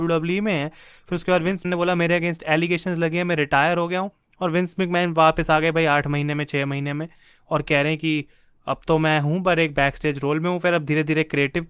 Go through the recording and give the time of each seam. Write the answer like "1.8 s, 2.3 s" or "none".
1.6 s